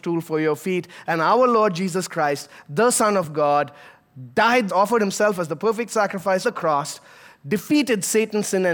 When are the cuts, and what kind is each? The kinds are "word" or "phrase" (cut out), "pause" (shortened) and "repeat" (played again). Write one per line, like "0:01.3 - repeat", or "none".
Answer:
0:04.7 - phrase
0:06.4 - word

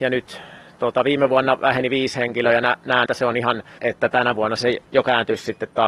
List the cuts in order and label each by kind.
0:03.1 - word
0:03.8 - word

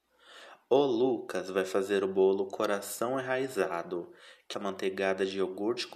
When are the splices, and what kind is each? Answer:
0:04.5 - phrase

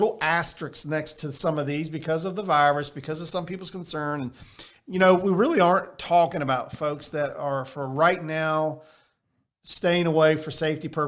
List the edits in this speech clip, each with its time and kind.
none

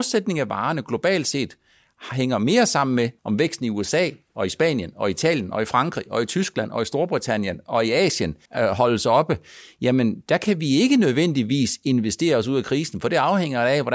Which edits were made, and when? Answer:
0:03.2 - pause
0:08.4 - pause

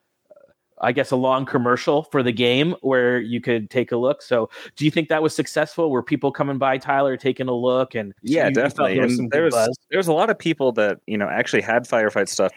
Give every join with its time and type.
0:08.2 - pause
0:09.8 - pause

